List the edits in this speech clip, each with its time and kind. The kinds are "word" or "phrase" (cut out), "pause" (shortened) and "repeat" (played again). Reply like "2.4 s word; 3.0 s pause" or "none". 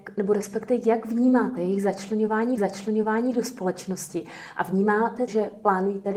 2.6 s repeat; 5.3 s word